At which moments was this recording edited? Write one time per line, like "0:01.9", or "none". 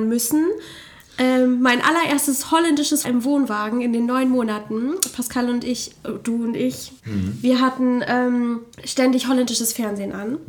0:03.0
0:07.0
0:08.7